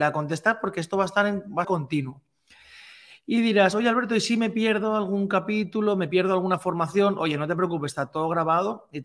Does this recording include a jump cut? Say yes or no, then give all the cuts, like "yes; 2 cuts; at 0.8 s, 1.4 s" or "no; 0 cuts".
yes; 1 cut; at 1.6 s